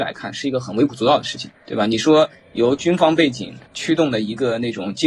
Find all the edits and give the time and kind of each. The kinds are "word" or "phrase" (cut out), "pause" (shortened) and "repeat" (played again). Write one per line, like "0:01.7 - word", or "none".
0:01.5 - pause
0:03.7 - pause